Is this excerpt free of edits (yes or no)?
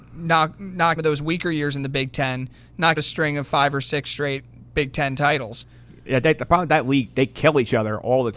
no